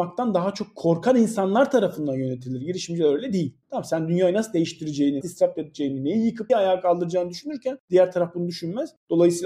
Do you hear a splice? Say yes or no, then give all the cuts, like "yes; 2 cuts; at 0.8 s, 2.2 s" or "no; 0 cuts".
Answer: yes; 2 cuts; at 5.2 s, 6.5 s